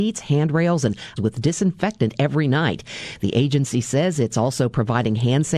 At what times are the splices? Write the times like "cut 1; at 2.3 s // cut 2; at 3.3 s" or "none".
cut 1; at 1.2 s